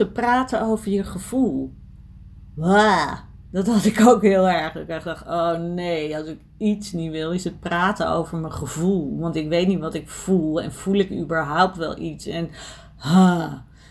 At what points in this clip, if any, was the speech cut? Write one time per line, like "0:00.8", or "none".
none